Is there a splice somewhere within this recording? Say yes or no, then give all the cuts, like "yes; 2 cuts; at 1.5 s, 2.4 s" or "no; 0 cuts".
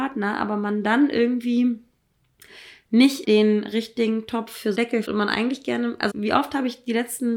yes; 4 cuts; at 3.2 s, 4.7 s, 5.0 s, 6.1 s